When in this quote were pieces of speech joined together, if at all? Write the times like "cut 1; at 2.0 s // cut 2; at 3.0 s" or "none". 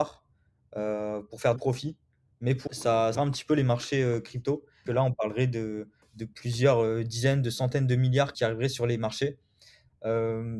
cut 1; at 1.6 s // cut 2; at 2.7 s // cut 3; at 3.1 s // cut 4; at 4.9 s // cut 5; at 6.0 s // cut 6; at 8.3 s